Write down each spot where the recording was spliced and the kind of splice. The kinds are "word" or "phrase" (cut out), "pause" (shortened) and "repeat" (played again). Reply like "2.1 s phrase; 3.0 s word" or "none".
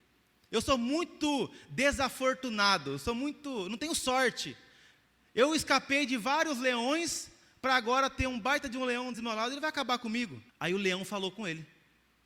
9.1 s word; 10.5 s pause